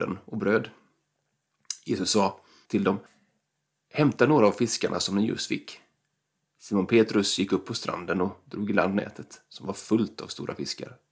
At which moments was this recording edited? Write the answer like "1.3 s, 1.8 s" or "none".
none